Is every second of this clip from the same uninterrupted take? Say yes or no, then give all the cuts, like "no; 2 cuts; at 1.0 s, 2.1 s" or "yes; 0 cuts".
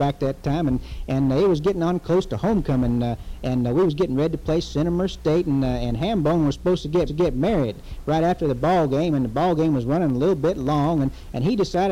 no; 1 cut; at 7.1 s